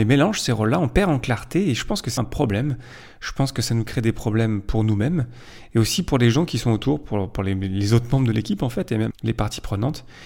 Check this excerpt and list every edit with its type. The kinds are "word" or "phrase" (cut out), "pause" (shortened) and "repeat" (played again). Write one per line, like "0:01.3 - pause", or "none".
0:02.2 - word
0:09.1 - word